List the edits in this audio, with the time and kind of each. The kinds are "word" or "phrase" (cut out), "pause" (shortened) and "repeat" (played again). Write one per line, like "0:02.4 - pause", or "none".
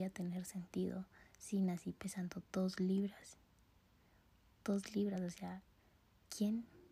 none